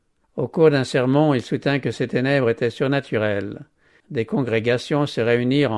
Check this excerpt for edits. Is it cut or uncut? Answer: uncut